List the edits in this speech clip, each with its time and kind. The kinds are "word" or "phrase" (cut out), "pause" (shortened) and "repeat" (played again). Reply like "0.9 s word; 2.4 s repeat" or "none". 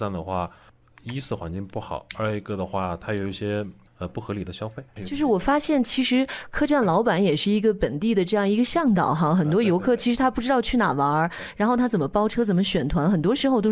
5.0 s word